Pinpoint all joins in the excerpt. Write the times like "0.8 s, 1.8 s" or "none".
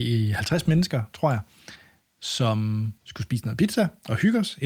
3.0 s